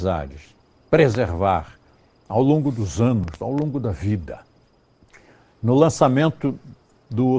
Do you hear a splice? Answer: no; 0 cuts

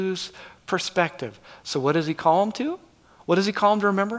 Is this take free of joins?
yes; 0 cuts

